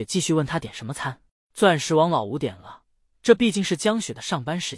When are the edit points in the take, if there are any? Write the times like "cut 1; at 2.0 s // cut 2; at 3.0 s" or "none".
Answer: cut 1; at 1.3 s